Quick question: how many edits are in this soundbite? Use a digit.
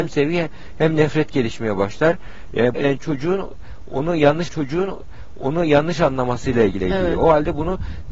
3